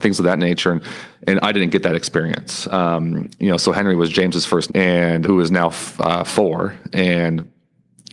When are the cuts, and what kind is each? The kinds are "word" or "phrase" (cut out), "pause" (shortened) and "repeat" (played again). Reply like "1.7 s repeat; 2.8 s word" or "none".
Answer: 4.7 s word; 5.2 s word